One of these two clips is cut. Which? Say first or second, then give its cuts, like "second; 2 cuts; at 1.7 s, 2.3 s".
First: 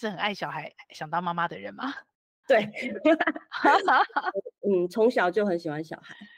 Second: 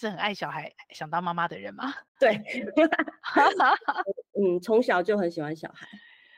second; 1 cut; at 2.1 s